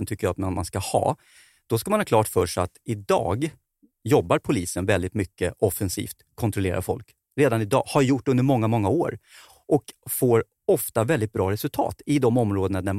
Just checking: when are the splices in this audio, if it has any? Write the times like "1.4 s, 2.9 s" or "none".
none